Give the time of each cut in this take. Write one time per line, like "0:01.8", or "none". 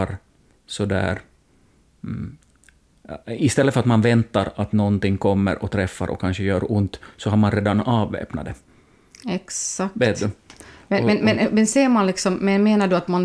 0:11.4